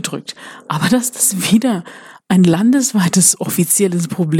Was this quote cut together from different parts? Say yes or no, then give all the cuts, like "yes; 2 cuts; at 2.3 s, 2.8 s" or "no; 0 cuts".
no; 0 cuts